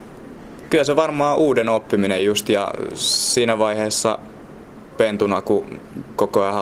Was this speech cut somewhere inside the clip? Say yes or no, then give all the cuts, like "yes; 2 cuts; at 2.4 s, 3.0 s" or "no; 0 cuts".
no; 0 cuts